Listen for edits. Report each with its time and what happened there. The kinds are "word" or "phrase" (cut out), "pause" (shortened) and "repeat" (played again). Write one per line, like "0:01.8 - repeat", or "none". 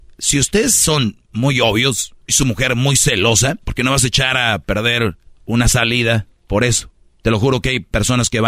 0:02.2 - pause
0:03.6 - pause
0:05.3 - pause